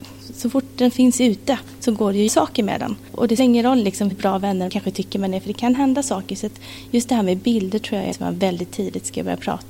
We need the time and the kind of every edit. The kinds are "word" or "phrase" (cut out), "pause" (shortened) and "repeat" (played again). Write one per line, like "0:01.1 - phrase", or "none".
0:02.3 - word
0:03.4 - word
0:04.1 - word
0:04.7 - word
0:08.1 - word